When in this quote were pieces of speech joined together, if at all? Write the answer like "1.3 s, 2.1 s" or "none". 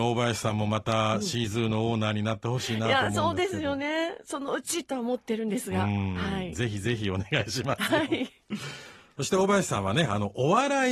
none